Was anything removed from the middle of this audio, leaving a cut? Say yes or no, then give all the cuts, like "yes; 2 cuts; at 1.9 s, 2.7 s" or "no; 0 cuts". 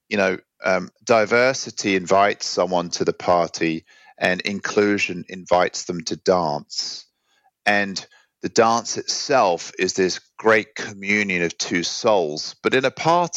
yes; 1 cut; at 1.0 s